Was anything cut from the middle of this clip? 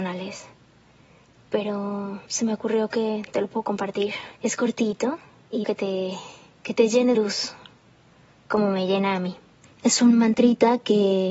yes; 4 cuts; at 2.3 s, 4.4 s, 5.6 s, 7.1 s

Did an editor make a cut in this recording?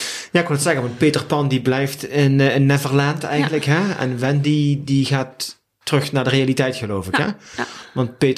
no; 0 cuts

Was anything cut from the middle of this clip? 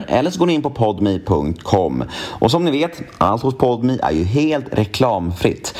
no; 0 cuts

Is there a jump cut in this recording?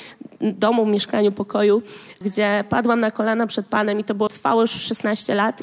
yes; 2 cuts; at 2.2 s, 4.3 s

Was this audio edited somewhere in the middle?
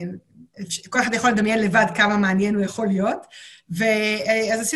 no; 0 cuts

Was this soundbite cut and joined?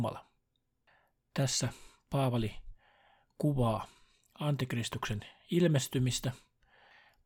no; 0 cuts

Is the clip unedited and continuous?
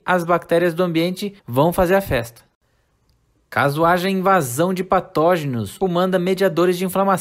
no; 2 cuts; at 1.4 s, 5.8 s

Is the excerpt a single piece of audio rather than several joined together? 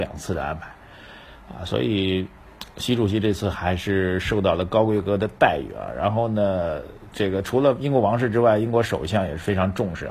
yes; 0 cuts

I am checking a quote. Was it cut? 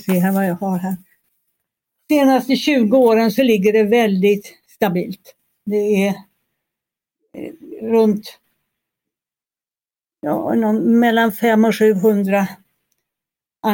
no; 0 cuts

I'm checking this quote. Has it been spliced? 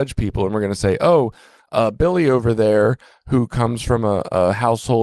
no; 0 cuts

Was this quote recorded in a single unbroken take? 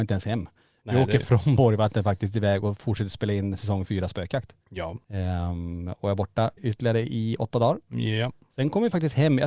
no; 2 cuts; at 4.6 s, 6.6 s

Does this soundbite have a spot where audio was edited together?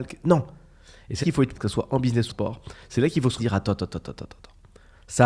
yes; 4 cuts; at 1.2 s, 1.5 s, 2.3 s, 3.4 s

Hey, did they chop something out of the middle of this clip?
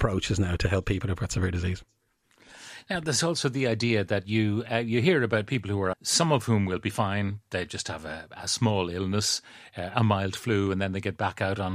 yes; 1 cut; at 5.9 s

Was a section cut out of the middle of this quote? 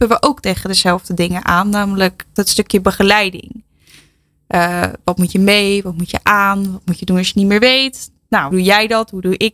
yes; 2 cuts; at 2.4 s, 8.5 s

